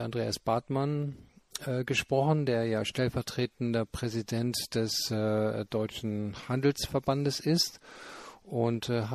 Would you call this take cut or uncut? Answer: uncut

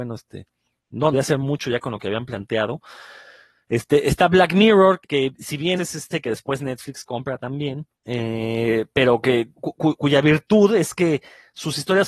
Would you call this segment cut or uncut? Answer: cut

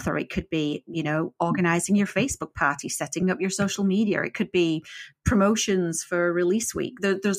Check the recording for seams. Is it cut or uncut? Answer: uncut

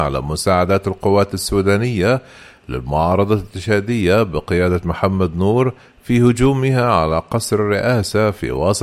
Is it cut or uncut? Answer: uncut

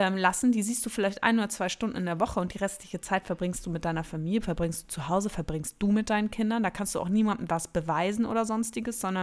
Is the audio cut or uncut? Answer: uncut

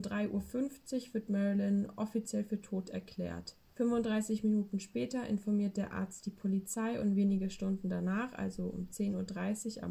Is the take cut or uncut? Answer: uncut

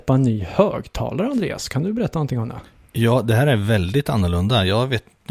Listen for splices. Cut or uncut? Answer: uncut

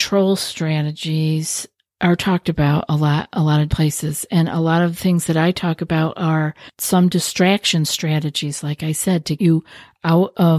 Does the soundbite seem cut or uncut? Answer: cut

